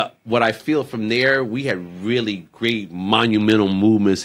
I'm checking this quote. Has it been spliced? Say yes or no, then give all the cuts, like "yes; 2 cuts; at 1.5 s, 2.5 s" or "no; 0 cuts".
no; 0 cuts